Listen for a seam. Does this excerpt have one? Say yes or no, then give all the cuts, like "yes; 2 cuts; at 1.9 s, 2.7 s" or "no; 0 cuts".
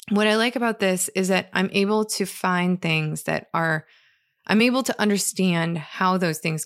no; 0 cuts